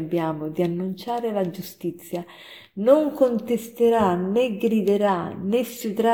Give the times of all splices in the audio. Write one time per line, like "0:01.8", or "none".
none